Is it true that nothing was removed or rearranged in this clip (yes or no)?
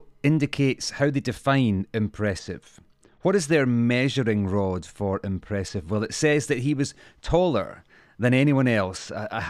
yes